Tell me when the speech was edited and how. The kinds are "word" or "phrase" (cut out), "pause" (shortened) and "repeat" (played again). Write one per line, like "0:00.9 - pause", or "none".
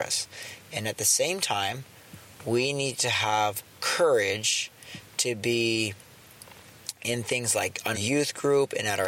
0:07.9 - word